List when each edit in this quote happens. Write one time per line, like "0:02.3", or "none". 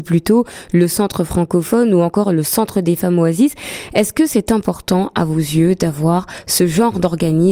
none